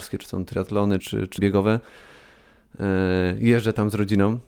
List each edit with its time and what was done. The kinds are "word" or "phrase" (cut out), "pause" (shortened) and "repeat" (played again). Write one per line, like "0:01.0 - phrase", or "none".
0:01.0 - word
0:01.4 - word